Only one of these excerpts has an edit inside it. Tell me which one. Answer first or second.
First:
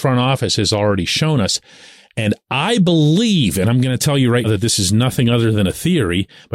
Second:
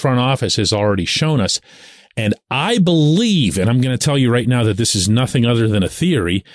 first